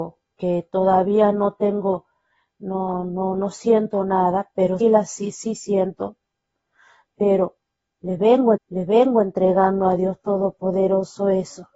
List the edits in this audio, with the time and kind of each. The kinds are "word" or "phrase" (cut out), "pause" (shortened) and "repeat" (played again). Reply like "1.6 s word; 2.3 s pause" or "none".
4.8 s word; 8.6 s repeat